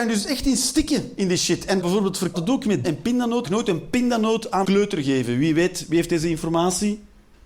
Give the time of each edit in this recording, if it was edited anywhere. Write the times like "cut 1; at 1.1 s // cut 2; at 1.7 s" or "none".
cut 1; at 1.8 s // cut 2; at 2.3 s // cut 3; at 2.8 s // cut 4; at 3.4 s // cut 5; at 4.6 s